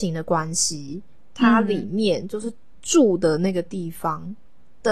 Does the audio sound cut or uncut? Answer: uncut